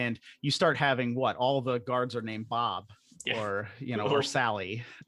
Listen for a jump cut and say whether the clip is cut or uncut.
uncut